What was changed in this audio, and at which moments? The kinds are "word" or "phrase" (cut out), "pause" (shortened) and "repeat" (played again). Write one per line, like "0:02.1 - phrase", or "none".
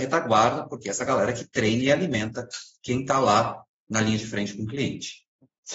none